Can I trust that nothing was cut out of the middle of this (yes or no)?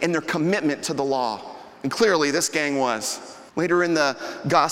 no